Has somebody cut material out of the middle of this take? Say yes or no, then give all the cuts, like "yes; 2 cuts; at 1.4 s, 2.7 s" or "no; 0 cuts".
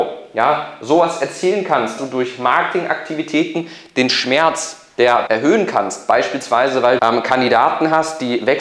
yes; 3 cuts; at 2.0 s, 5.3 s, 7.0 s